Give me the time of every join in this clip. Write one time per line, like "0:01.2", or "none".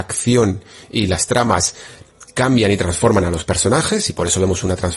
none